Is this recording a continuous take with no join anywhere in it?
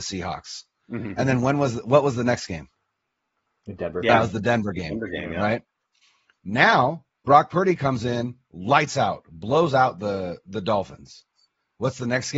yes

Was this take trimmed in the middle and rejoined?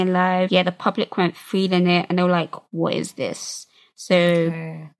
no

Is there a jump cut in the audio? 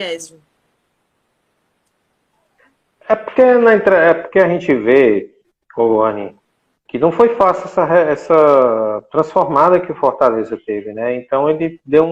no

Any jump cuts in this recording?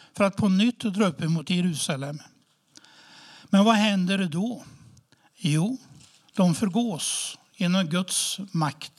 no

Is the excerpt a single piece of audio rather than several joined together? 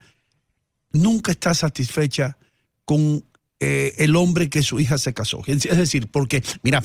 yes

